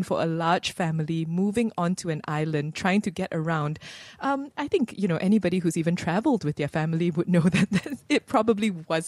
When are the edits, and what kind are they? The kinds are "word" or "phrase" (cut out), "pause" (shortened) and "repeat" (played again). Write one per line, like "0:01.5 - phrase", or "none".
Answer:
none